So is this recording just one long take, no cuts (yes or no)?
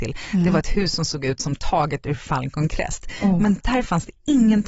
yes